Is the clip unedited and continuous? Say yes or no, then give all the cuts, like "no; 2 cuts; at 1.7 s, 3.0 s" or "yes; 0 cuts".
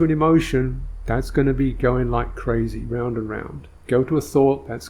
yes; 0 cuts